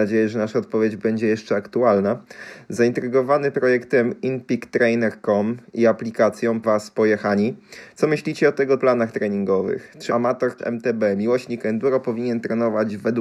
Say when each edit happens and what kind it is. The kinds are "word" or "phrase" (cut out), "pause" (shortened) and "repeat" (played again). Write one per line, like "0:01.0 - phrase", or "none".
0:03.5 - word
0:06.6 - word
0:08.8 - word
0:10.1 - word
0:10.6 - word

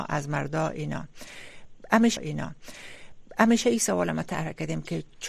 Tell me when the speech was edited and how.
0:02.2 - repeat

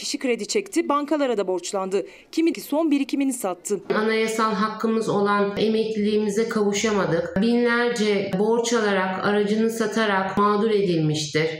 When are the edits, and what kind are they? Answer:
0:02.5 - phrase
0:08.3 - word

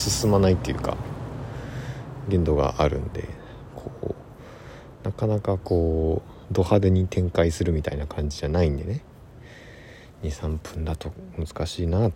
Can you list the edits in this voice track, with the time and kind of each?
none

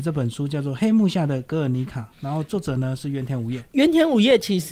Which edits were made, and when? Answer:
0:02.1 - pause

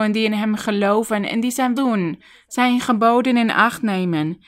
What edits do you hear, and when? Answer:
0:01.8 - word

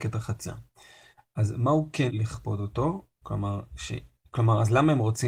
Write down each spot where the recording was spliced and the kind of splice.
0:02.1 - word

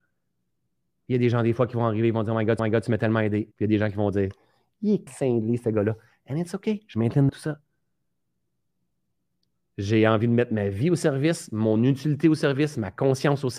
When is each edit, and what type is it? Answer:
0:02.6 - repeat
0:03.5 - pause
0:05.1 - word
0:07.3 - word

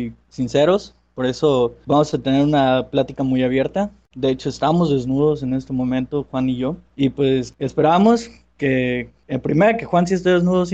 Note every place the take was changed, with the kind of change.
none

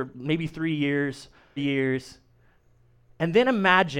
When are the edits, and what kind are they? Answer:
0:01.6 - word

